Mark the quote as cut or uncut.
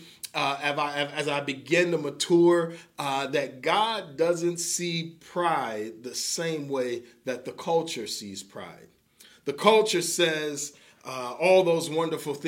uncut